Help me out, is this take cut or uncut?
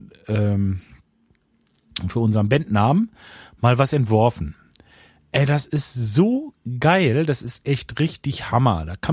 uncut